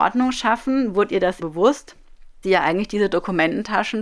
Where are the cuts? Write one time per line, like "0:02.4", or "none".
0:01.4
0:02.4

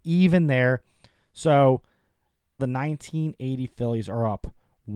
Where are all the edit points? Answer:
0:02.6

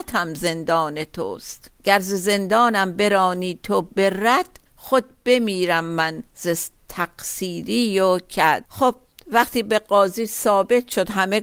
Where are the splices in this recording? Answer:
0:01.8
0:04.7
0:06.3
0:08.7

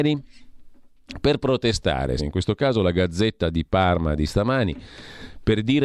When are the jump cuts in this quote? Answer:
0:02.2

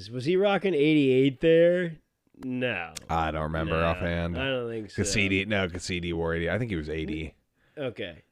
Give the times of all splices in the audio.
none

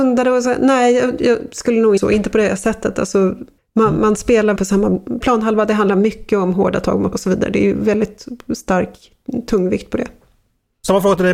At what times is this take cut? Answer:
0:02.0
0:03.6
0:04.6
0:05.2
0:07.1

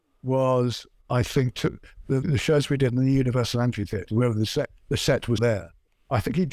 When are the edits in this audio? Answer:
0:02.2
0:05.4

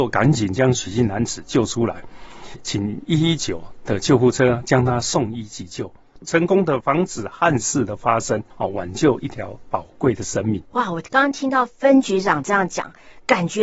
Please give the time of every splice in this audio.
0:08.5
0:10.7

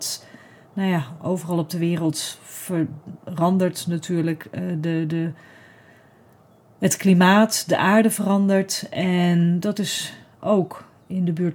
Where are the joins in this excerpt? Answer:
none

